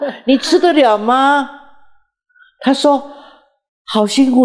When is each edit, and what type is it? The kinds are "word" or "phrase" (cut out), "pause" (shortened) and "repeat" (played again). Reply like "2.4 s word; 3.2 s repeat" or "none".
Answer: none

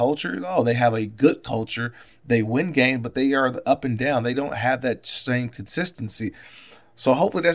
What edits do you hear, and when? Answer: none

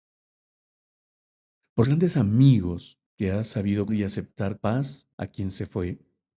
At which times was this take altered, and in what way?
1.8 s word; 3.1 s pause; 3.9 s word; 4.6 s word; 5.1 s pause

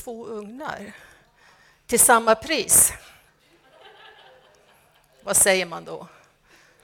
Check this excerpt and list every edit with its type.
none

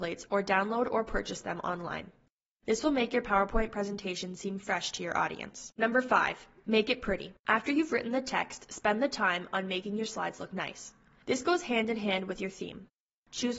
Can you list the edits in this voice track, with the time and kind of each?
5.7 s pause; 7.4 s pause

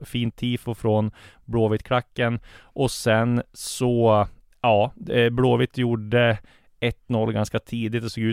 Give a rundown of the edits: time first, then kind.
none

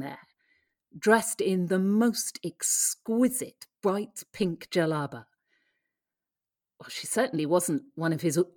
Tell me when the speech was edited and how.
none

